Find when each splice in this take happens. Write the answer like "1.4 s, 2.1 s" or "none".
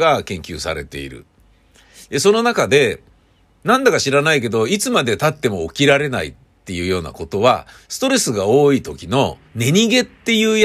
9.5 s